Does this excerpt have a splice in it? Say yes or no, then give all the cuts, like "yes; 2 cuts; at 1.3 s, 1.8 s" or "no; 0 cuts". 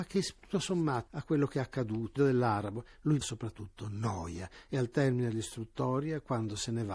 yes; 3 cuts; at 1.1 s, 2.2 s, 3.2 s